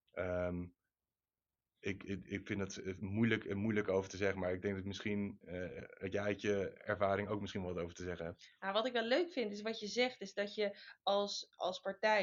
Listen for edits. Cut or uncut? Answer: uncut